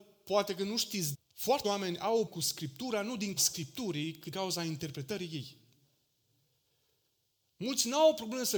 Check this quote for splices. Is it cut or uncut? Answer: cut